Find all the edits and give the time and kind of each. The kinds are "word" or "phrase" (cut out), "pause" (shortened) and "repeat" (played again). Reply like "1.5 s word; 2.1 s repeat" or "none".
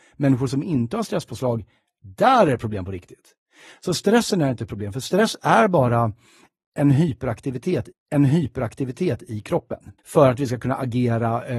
7.9 s repeat; 10.0 s pause